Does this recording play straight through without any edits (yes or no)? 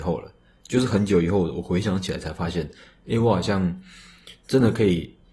yes